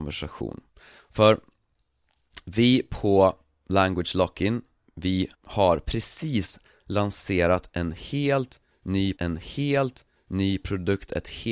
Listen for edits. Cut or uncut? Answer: cut